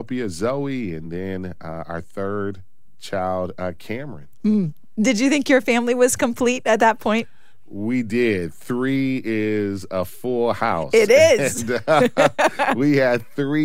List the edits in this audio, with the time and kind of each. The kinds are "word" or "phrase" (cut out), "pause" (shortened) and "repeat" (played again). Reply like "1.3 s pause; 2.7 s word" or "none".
none